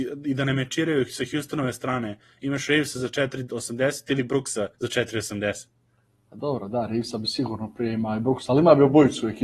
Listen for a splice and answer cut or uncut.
cut